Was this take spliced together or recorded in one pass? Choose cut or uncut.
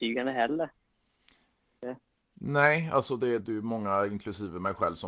cut